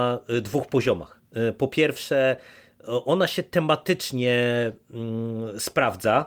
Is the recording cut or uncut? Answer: uncut